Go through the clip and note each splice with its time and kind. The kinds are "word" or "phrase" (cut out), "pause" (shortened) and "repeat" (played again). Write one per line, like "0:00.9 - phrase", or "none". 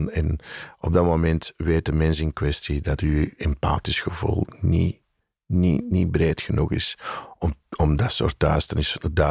none